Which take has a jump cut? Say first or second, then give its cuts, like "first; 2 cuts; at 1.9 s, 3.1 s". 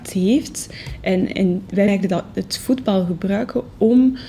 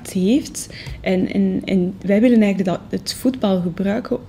first; 2 cuts; at 1.3 s, 1.9 s